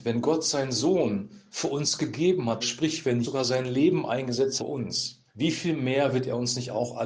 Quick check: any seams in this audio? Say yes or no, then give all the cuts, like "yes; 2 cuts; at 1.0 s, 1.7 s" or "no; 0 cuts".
yes; 4 cuts; at 2.6 s, 3.2 s, 4.6 s, 5.3 s